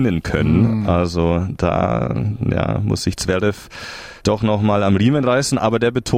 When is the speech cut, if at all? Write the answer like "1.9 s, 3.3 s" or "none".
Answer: 4.2 s